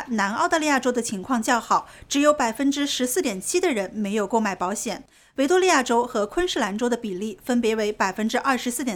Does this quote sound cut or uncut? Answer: uncut